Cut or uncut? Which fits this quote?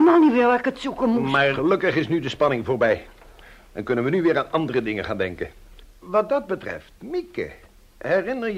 uncut